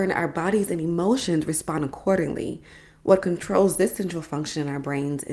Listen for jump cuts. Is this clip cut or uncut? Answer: uncut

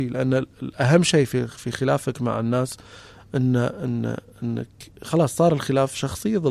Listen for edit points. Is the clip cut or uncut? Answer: uncut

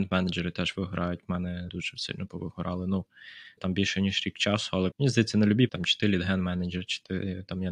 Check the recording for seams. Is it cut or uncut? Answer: cut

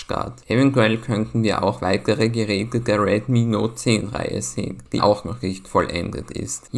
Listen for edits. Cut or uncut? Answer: cut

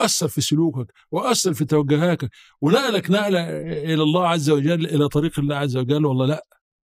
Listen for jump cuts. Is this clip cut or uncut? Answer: uncut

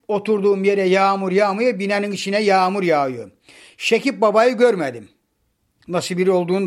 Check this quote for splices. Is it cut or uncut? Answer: uncut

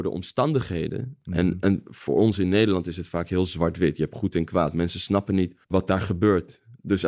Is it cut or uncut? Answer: cut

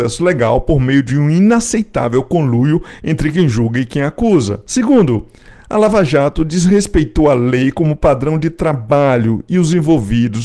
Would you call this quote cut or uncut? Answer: uncut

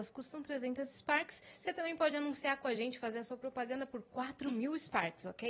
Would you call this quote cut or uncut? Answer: uncut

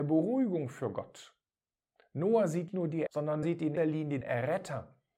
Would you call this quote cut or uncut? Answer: cut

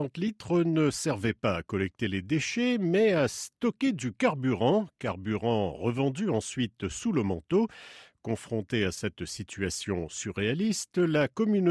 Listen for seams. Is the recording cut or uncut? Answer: uncut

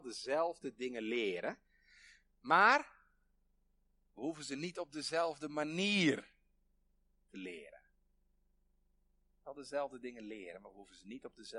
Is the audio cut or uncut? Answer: uncut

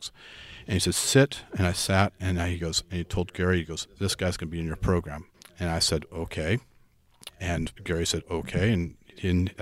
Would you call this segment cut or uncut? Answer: cut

